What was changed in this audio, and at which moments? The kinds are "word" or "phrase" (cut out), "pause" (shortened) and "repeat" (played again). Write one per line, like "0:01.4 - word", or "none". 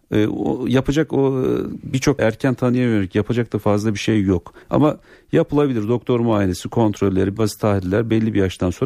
0:02.2 - phrase
0:04.6 - pause
0:07.4 - word

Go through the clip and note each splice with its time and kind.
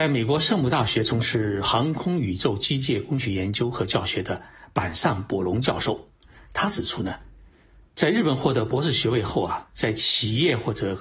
none

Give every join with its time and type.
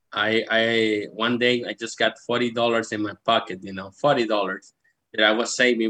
none

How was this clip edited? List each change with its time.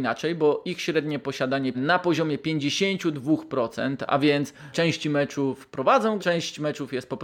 0:01.7 - phrase
0:04.7 - word
0:06.2 - word

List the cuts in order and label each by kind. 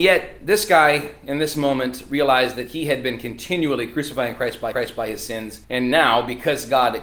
0:04.7 - repeat
0:05.6 - pause

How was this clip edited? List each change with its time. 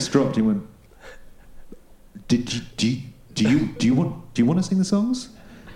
0:04.4 - phrase

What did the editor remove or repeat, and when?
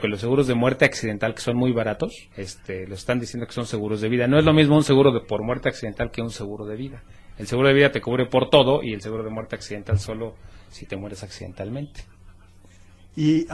0:02.3 - pause

